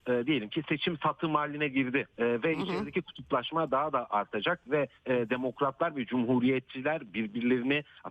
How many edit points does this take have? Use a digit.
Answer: 2